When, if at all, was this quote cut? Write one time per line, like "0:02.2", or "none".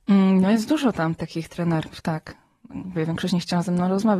none